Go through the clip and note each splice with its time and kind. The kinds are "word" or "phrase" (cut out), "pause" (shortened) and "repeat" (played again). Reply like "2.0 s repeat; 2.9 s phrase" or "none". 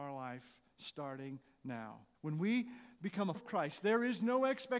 2.1 s pause; 2.9 s pause; 3.3 s word